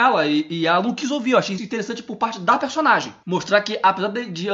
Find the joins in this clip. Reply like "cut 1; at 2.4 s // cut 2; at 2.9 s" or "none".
cut 1; at 1.6 s